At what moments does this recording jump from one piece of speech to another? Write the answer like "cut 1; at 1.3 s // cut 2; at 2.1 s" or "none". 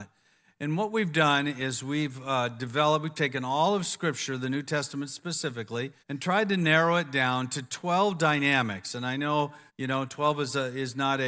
cut 1; at 6.0 s // cut 2; at 9.7 s